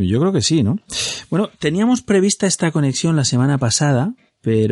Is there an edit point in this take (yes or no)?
no